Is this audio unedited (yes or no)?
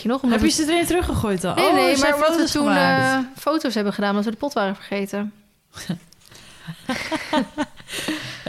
yes